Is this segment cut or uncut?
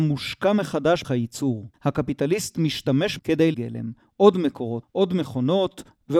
cut